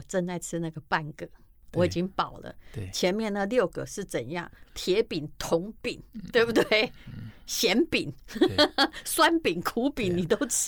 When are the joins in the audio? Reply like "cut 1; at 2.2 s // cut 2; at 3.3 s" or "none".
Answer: none